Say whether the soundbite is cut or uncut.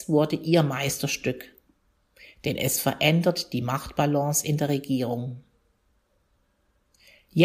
uncut